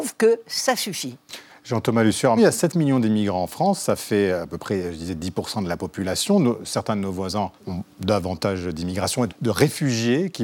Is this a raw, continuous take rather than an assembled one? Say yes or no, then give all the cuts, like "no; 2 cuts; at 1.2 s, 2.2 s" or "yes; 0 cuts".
no; 3 cuts; at 2.4 s, 7.6 s, 9.3 s